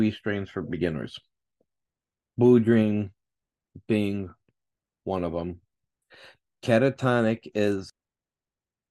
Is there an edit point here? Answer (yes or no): no